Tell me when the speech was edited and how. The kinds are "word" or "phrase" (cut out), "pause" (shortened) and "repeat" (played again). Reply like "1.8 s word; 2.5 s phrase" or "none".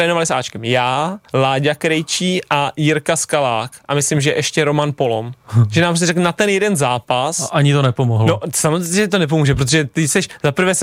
1.3 s pause